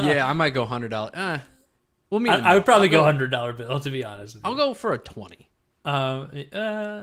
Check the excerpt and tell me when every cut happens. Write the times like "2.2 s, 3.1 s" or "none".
none